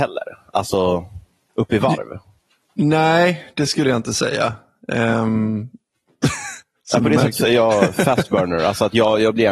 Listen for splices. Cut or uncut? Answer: uncut